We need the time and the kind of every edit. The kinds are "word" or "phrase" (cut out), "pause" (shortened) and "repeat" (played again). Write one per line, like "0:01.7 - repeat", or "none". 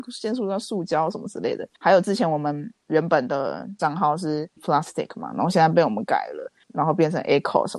0:01.7 - pause
0:03.8 - word
0:04.6 - word
0:06.6 - pause